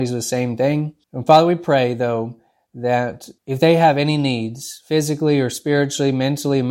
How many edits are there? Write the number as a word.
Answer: two